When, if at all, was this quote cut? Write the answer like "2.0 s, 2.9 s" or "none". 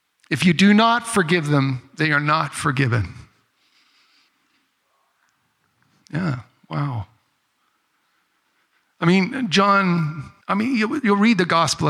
10.4 s